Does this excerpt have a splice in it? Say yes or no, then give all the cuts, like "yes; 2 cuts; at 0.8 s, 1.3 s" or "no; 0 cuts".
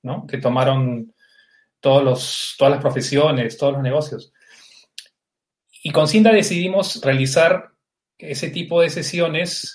no; 0 cuts